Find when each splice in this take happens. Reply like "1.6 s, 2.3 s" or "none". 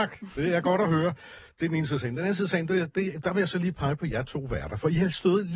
none